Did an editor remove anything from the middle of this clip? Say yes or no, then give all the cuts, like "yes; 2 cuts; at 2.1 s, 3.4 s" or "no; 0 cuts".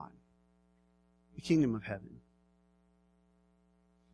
no; 0 cuts